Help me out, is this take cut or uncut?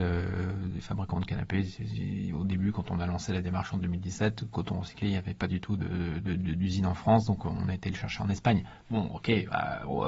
uncut